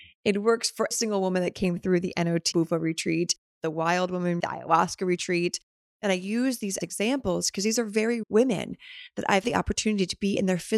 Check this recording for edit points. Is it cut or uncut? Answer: cut